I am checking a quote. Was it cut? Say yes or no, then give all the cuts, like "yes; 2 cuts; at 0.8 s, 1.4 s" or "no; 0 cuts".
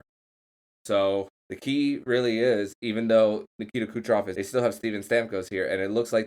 yes; 2 cuts; at 1.4 s, 4.4 s